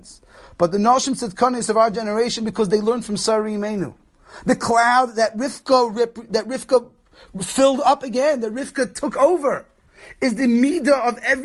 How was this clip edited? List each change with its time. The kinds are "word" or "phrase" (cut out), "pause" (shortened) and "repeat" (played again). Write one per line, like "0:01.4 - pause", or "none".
none